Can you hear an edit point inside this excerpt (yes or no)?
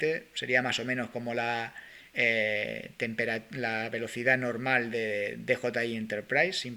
yes